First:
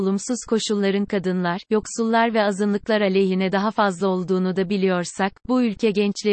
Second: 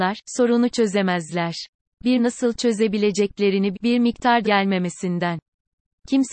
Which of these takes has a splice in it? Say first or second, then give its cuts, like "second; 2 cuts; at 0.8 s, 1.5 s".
second; 3 cuts; at 2.2 s, 3.7 s, 4.4 s